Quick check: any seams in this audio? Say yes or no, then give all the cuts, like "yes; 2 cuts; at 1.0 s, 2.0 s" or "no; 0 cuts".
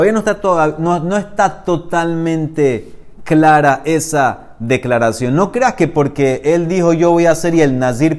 no; 0 cuts